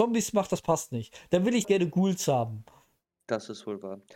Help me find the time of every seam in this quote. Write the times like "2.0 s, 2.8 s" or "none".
1.6 s